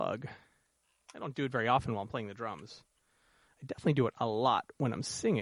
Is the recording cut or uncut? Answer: uncut